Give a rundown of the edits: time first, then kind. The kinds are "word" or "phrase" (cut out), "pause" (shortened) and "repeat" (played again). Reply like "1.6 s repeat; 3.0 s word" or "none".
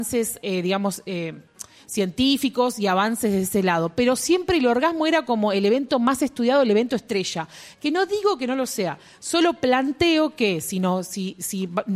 none